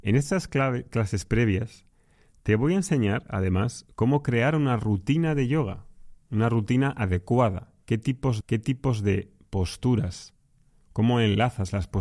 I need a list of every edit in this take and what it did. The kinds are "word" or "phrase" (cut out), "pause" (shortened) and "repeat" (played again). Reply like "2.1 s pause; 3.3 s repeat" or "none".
8.4 s repeat